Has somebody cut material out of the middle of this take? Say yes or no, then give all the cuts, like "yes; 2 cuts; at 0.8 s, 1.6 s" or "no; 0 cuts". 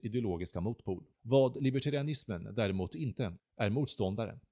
yes; 2 cuts; at 1.1 s, 3.4 s